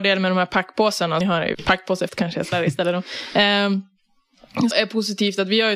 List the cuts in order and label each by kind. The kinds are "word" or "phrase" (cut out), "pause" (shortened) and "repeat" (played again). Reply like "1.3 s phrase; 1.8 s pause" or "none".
1.2 s word; 1.5 s word; 2.1 s word; 2.5 s word; 4.7 s word